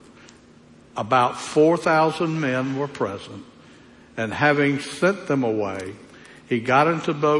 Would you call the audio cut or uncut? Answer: uncut